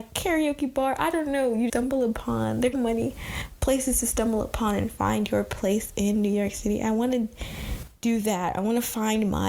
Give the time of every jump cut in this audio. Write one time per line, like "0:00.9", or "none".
0:01.7
0:02.7